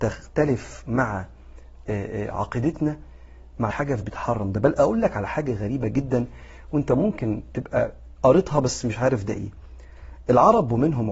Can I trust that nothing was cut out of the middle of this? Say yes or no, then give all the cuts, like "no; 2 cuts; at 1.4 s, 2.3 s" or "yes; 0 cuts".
no; 2 cuts; at 3.7 s, 4.0 s